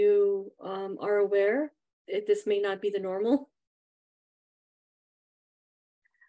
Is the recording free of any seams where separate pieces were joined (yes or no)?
no